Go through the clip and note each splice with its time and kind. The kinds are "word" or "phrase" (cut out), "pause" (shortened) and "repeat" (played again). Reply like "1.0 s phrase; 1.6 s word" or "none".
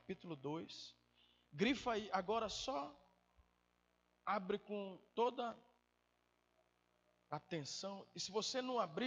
5.1 s word